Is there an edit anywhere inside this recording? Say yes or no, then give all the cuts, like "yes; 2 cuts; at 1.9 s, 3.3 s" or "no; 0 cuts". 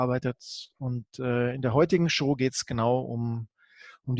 no; 0 cuts